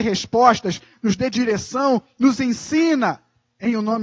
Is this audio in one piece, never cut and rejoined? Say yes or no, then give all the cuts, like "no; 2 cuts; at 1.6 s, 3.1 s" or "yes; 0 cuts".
yes; 0 cuts